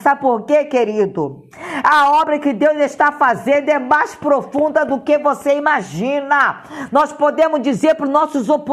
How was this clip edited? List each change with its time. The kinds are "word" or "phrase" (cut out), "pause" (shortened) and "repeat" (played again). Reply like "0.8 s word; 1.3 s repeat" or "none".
none